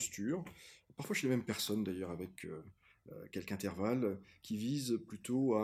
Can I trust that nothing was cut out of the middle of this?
yes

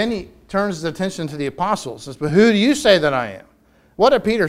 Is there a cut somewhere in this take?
no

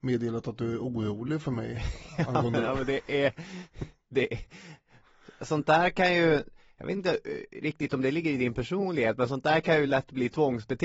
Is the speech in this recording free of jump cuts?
yes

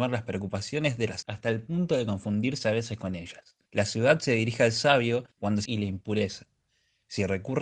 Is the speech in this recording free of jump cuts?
no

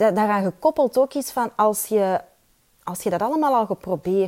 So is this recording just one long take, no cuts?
yes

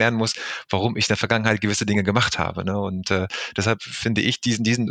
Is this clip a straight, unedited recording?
yes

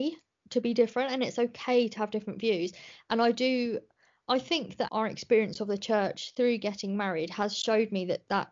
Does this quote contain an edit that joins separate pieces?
yes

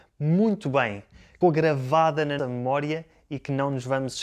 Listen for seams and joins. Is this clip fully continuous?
no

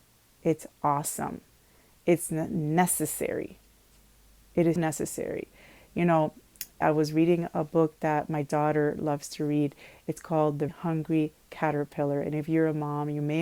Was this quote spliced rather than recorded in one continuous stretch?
yes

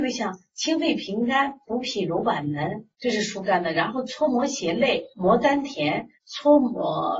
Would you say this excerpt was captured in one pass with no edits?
no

